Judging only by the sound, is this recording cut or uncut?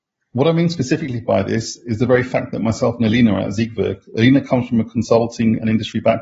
uncut